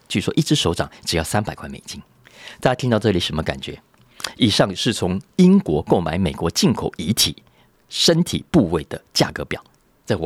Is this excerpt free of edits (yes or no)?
yes